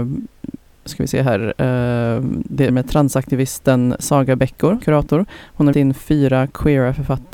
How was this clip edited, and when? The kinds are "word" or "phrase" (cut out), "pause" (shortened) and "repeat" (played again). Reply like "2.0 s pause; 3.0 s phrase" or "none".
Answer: 2.7 s word; 4.8 s word; 5.7 s word